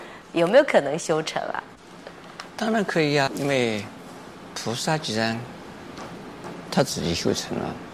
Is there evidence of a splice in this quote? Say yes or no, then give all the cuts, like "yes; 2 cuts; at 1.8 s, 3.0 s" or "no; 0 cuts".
yes; 1 cut; at 3.3 s